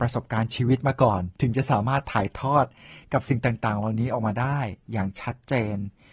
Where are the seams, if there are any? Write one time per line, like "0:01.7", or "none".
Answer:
0:01.3

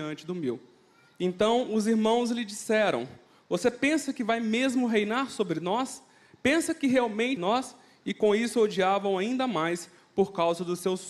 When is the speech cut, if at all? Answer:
0:07.4

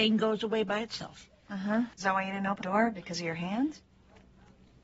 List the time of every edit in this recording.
0:01.9
0:02.6

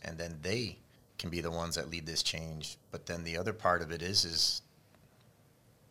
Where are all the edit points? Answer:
none

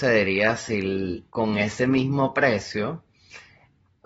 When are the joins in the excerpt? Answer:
0:01.3

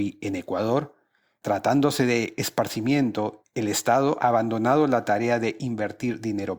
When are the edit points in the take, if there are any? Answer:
0:01.4
0:03.4
0:04.2

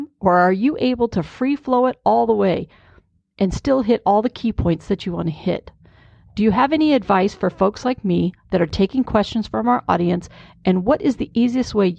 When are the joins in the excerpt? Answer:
none

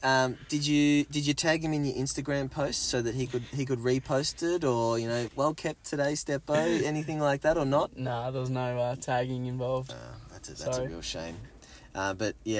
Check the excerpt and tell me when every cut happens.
0:05.3

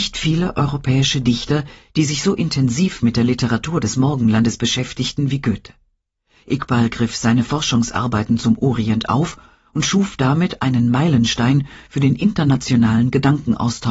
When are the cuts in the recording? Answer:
none

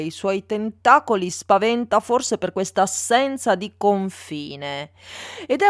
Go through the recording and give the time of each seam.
none

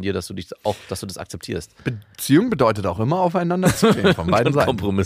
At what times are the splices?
none

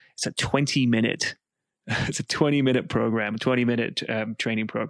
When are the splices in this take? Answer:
none

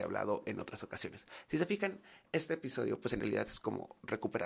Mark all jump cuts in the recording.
none

